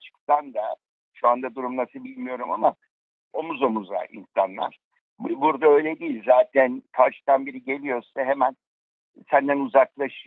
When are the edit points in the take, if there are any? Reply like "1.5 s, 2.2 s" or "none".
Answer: none